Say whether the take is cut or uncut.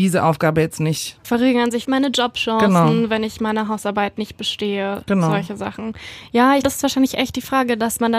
cut